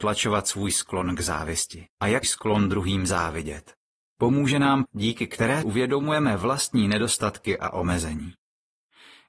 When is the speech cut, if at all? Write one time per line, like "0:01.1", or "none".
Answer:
0:01.9
0:02.2
0:04.8
0:05.6